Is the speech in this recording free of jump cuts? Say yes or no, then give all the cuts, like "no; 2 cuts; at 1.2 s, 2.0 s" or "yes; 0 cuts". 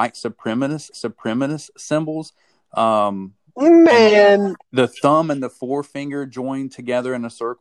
no; 2 cuts; at 0.9 s, 4.6 s